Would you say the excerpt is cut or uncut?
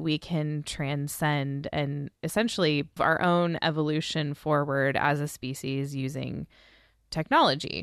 cut